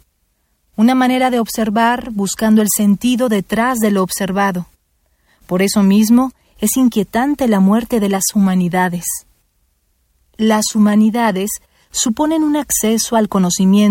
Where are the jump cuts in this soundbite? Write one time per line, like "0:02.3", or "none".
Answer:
none